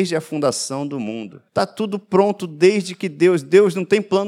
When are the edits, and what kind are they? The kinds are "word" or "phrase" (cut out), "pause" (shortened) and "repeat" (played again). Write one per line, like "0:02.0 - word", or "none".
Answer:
0:01.5 - pause